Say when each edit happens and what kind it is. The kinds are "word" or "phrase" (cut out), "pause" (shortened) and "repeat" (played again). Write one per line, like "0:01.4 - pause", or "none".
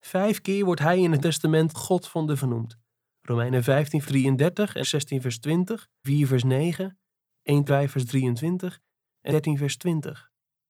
0:01.2 - word
0:01.7 - word
0:02.4 - word
0:04.0 - word
0:04.8 - word
0:06.0 - word
0:07.7 - word
0:09.3 - word

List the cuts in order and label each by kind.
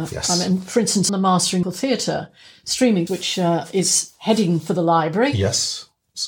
0:01.1 - word
0:01.6 - word
0:03.1 - word

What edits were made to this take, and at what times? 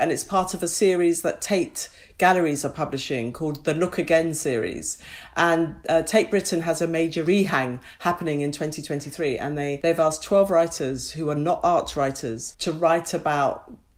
none

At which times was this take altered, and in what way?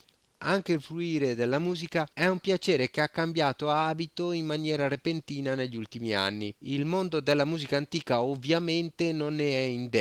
0:02.1 - pause
0:06.6 - pause

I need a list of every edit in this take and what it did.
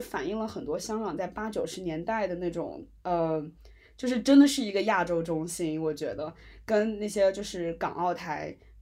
none

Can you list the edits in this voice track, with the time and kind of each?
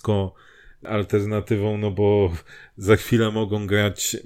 none

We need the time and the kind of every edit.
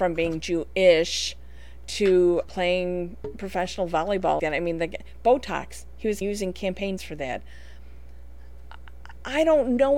0:02.4 - word
0:04.4 - phrase
0:06.2 - phrase
0:07.0 - word

